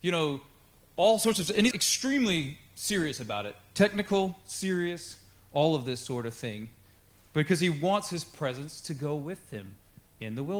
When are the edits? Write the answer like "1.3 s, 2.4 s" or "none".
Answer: 1.7 s